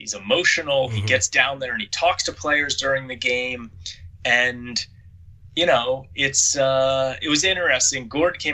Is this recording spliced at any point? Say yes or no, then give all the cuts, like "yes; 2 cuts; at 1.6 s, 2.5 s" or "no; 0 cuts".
no; 0 cuts